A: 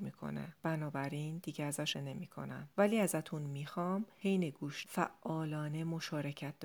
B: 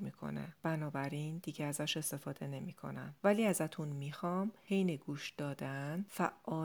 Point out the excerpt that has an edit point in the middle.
A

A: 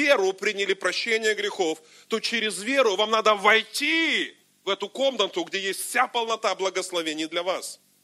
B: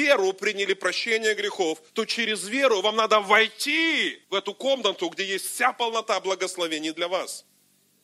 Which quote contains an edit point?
B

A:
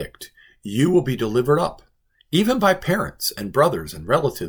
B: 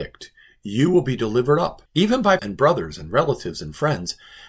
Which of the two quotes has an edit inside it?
B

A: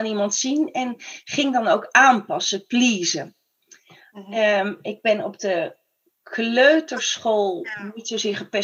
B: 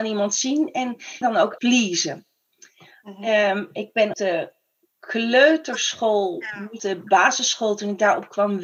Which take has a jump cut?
B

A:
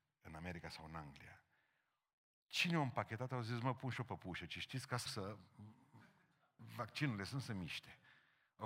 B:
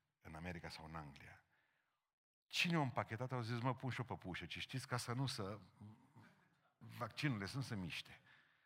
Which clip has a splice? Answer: A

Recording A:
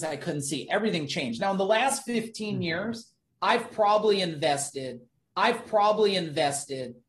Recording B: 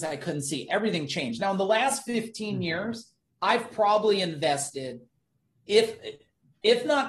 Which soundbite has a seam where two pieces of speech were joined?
A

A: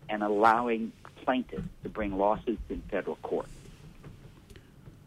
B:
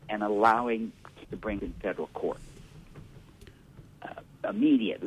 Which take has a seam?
B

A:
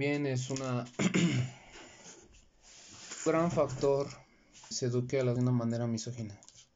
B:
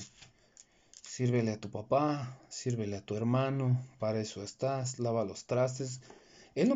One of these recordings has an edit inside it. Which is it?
A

